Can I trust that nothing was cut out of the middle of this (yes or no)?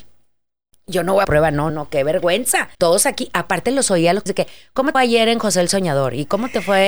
no